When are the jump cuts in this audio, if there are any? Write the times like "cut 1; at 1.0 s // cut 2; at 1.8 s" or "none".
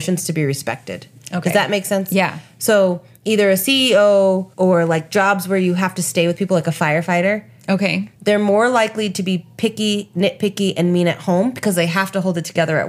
cut 1; at 4.5 s // cut 2; at 8.2 s